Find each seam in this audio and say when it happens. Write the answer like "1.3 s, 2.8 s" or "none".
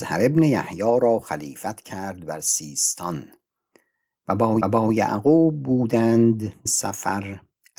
4.6 s, 6.7 s